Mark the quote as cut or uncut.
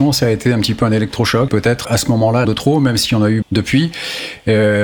cut